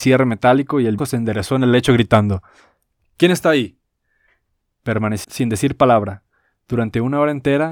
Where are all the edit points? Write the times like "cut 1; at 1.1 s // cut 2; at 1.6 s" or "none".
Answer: cut 1; at 1.0 s // cut 2; at 5.2 s